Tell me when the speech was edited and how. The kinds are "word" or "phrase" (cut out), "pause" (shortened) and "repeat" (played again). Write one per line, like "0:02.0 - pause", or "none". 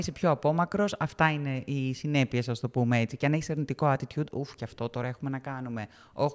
none